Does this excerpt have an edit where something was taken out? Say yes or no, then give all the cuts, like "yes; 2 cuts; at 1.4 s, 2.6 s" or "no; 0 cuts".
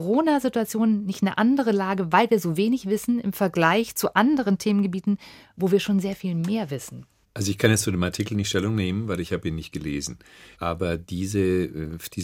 no; 0 cuts